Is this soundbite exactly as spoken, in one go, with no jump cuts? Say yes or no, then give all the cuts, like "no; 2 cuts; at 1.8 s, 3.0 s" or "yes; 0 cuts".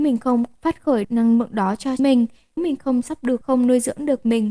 no; 5 cuts; at 1.0 s, 2.0 s, 2.6 s, 3.0 s, 3.4 s